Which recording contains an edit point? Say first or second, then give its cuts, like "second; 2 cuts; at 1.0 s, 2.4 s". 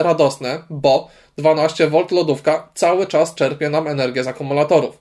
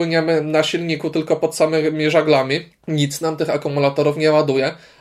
second; 1 cut; at 2.7 s